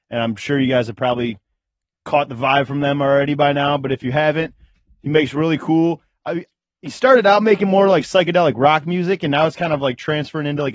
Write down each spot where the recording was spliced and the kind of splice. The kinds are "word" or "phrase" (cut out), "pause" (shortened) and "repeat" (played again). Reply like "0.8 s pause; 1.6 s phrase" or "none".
none